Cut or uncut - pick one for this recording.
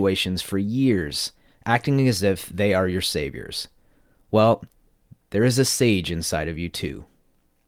uncut